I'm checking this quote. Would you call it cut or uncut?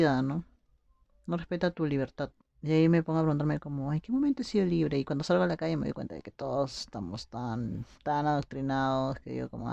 cut